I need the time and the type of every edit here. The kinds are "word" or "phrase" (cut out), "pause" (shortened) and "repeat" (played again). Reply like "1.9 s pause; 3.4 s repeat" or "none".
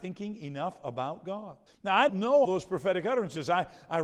1.7 s pause; 2.1 s word; 2.4 s word